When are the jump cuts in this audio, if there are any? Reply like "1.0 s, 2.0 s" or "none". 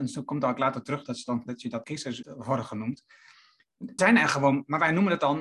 1.5 s, 1.8 s, 2.2 s, 4.0 s